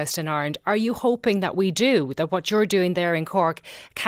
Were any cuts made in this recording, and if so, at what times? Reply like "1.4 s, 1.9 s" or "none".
none

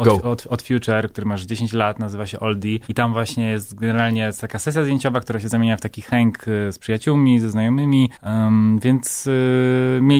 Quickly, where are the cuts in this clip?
2.8 s, 8.1 s

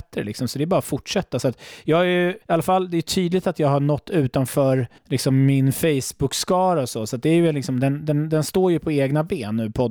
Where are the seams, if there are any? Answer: 2.4 s, 5.0 s

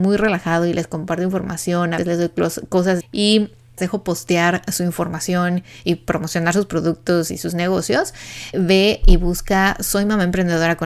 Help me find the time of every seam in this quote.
2.0 s, 3.0 s, 3.8 s, 8.5 s

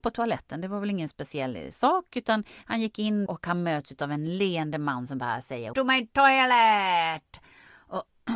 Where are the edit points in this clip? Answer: 3.3 s, 5.7 s

